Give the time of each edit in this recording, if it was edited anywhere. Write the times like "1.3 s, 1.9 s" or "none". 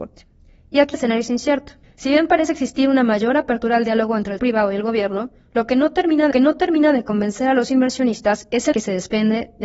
0.9 s, 1.8 s, 4.4 s, 6.3 s, 8.7 s